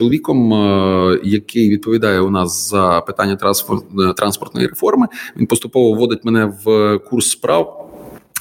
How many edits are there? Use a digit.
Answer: 0